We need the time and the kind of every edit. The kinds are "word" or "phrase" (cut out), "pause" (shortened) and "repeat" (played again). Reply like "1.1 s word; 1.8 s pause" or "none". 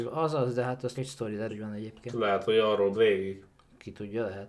0.9 s word; 1.5 s word; 2.9 s word